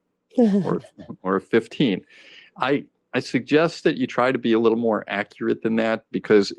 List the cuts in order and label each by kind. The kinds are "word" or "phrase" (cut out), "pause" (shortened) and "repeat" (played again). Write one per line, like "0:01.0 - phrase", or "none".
none